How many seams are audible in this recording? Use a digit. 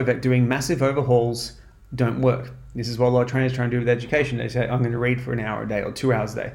0